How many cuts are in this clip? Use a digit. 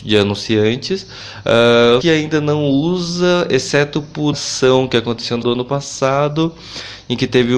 3